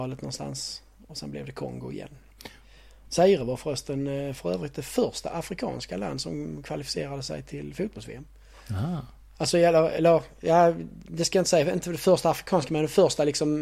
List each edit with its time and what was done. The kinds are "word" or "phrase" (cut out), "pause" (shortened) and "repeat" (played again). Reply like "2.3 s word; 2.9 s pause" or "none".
none